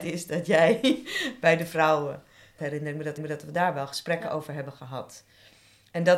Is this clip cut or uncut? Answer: cut